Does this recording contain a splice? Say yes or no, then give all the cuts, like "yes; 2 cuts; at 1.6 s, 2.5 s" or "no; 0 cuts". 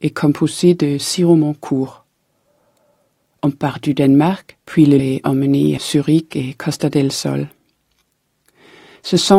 yes; 3 cuts; at 4.6 s, 5.0 s, 5.8 s